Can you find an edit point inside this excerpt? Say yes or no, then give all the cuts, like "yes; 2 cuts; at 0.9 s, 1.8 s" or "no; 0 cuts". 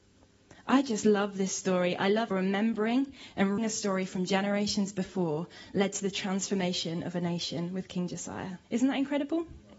yes; 3 cuts; at 2.3 s, 3.6 s, 8.6 s